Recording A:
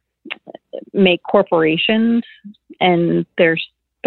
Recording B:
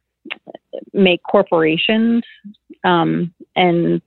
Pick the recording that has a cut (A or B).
A